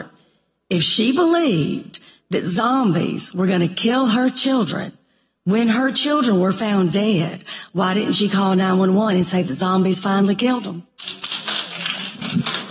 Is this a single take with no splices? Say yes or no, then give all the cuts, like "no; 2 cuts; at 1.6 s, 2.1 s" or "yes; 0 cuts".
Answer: yes; 0 cuts